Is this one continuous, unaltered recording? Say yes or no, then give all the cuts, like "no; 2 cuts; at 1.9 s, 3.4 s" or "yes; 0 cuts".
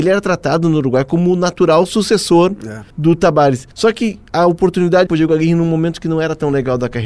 no; 3 cuts; at 2.9 s, 3.7 s, 5.1 s